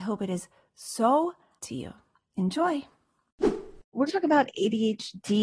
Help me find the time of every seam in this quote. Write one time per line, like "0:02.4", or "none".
0:01.6
0:04.1